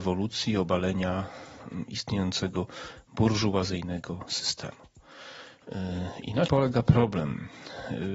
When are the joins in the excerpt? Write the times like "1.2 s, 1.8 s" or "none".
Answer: 6.5 s